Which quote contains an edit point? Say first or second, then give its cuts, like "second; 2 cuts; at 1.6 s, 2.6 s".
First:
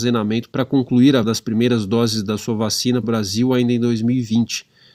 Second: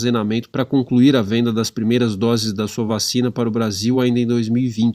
first; 2 cuts; at 1.2 s, 3.0 s